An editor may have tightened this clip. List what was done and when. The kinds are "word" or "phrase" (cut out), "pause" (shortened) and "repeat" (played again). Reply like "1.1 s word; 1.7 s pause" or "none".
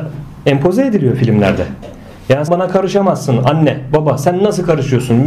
2.5 s word

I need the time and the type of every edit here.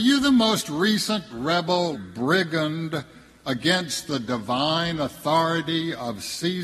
1.3 s word; 1.9 s word

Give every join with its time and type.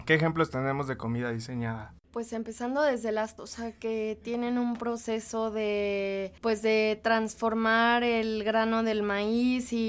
2.0 s pause; 3.4 s word; 6.4 s pause

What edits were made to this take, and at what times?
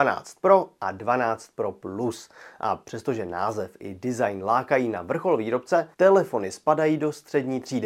5.9 s pause

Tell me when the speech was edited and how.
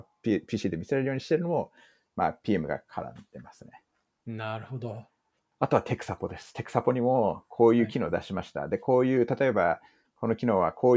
none

